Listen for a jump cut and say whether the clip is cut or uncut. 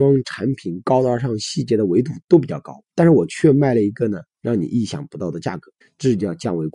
cut